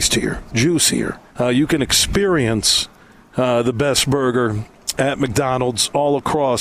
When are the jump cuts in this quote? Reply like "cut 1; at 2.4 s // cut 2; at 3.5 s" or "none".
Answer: cut 1; at 1.3 s // cut 2; at 3.0 s

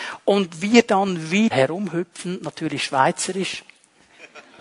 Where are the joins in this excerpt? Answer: cut 1; at 1.5 s

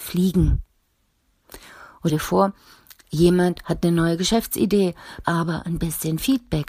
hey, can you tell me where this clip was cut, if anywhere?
cut 1; at 2.1 s // cut 2; at 5.2 s

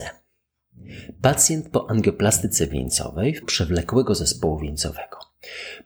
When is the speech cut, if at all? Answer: cut 1; at 3.4 s

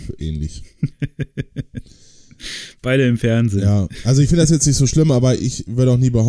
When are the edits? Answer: none

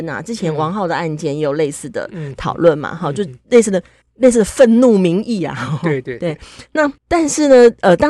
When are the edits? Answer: cut 1; at 4.0 s // cut 2; at 7.0 s

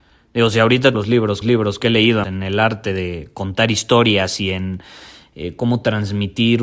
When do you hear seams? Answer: cut 1; at 0.9 s // cut 2; at 1.4 s // cut 3; at 2.2 s

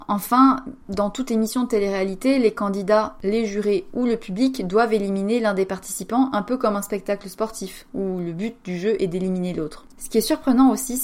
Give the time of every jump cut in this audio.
none

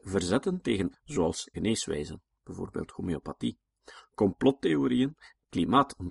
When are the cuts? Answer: cut 1; at 0.9 s // cut 2; at 1.5 s

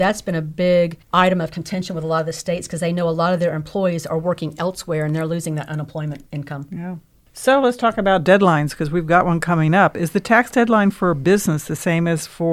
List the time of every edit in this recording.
none

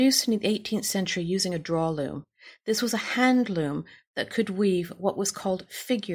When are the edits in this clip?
none

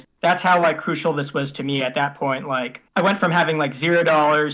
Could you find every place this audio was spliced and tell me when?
cut 1; at 2.9 s

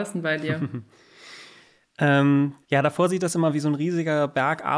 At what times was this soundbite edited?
cut 1; at 2.6 s

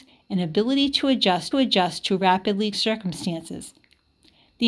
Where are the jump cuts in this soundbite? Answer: cut 1; at 1.5 s // cut 2; at 2.7 s

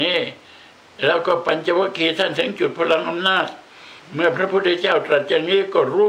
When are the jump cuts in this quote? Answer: cut 1; at 4.0 s

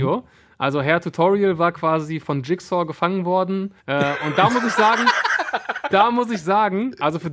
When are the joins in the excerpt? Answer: cut 1; at 3.8 s

